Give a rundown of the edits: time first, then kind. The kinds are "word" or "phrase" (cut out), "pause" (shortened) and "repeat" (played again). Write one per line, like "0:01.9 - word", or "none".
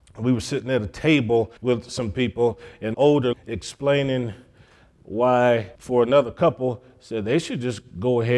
0:01.6 - pause
0:02.9 - phrase
0:03.3 - word
0:05.7 - pause